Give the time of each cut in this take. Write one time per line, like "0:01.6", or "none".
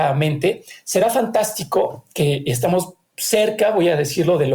none